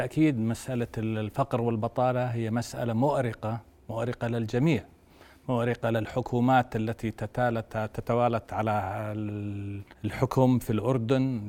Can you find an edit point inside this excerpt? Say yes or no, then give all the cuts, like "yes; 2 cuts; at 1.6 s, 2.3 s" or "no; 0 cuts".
yes; 1 cut; at 9.9 s